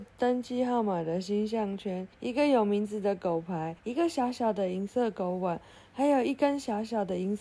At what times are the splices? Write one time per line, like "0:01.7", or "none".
0:02.1
0:03.8